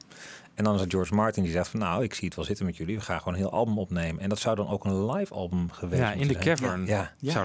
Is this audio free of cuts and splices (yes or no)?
yes